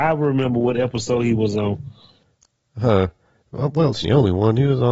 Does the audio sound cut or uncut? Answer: cut